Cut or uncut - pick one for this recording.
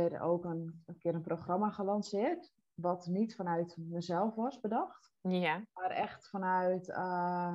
uncut